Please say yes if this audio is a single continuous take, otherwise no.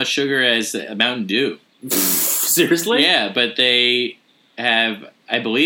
yes